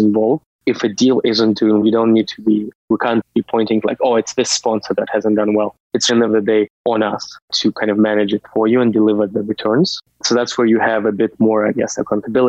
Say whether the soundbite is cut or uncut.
cut